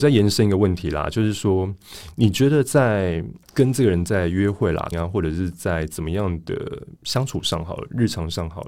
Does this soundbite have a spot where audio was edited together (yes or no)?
yes